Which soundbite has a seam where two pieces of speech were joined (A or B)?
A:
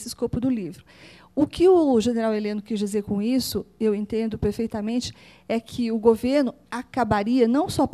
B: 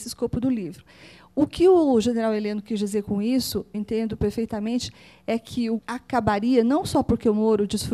B